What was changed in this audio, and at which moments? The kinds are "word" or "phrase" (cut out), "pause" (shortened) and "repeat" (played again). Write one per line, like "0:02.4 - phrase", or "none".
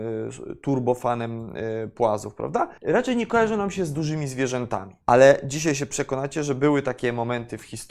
0:02.8 - pause
0:05.0 - pause